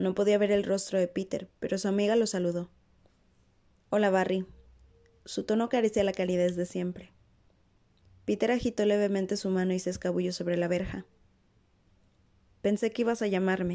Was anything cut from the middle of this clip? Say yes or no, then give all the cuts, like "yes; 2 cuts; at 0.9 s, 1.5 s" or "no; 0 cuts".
no; 0 cuts